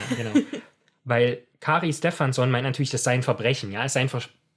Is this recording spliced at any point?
yes; 1 cut; at 1.5 s

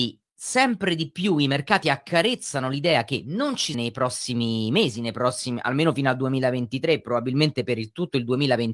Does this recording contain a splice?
yes; 1 cut; at 3.7 s

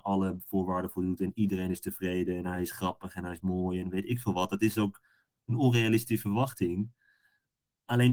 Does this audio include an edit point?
no; 0 cuts

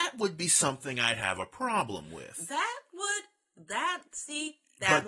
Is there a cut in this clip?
no; 0 cuts

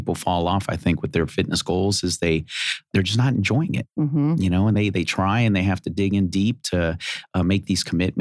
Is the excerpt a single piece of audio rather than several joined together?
yes; 0 cuts

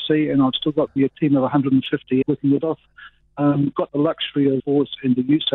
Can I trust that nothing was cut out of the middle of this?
no; 5 cuts; at 1.0 s, 2.2 s, 2.6 s, 3.7 s, 4.6 s

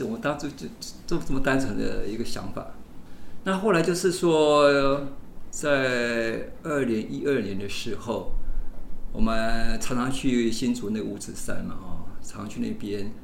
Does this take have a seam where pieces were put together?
no; 0 cuts

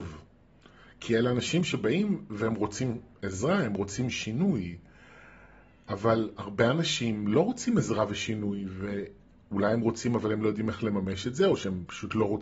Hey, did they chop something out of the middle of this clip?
no; 0 cuts

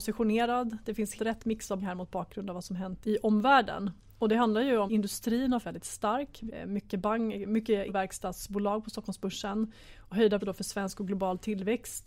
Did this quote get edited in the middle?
yes; 8 cuts; at 1.2 s, 1.8 s, 3.0 s, 4.9 s, 5.6 s, 6.5 s, 7.9 s, 10.4 s

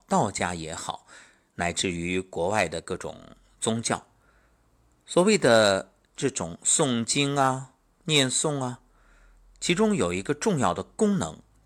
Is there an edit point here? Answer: no; 0 cuts

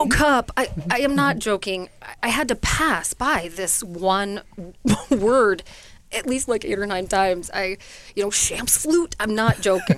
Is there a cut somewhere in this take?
no; 0 cuts

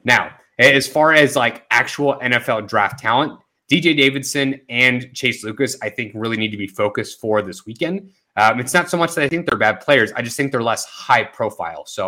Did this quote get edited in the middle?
no; 0 cuts

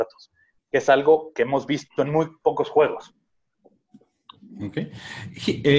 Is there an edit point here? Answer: yes; 1 cut; at 1.3 s

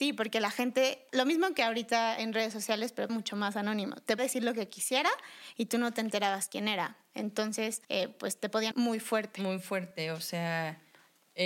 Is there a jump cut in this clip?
yes; 5 cuts; at 1.1 s, 3.1 s, 4.2 s, 7.8 s, 8.7 s

